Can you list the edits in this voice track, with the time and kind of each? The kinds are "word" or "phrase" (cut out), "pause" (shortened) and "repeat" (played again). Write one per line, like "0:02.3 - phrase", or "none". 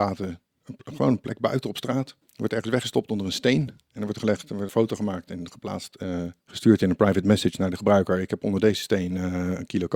0:02.2 - pause
0:04.7 - word
0:06.4 - pause